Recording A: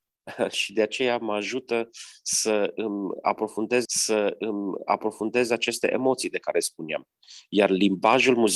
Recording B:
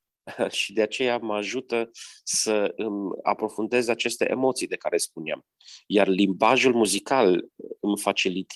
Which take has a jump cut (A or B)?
A